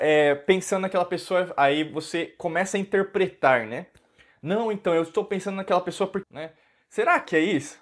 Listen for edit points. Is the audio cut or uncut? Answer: cut